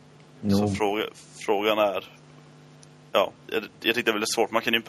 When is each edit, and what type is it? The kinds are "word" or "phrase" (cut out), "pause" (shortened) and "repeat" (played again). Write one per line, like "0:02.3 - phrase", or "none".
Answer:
0:03.4 - pause

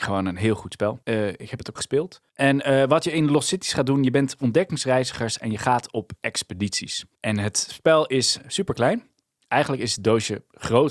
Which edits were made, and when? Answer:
0:01.0 - pause
0:01.8 - word
0:02.3 - pause
0:07.1 - pause

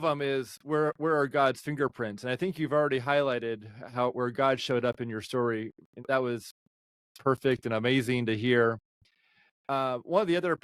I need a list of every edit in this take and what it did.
0:06.0 - word

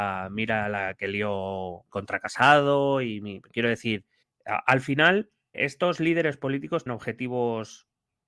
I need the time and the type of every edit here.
0:01.9 - word
0:04.2 - pause
0:05.5 - word
0:06.9 - word

